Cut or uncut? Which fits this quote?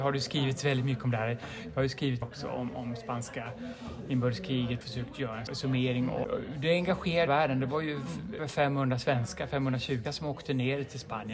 cut